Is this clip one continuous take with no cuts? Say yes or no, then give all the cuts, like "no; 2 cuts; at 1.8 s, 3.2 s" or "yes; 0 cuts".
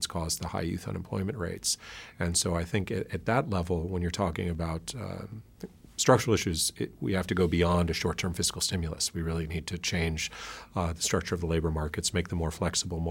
yes; 0 cuts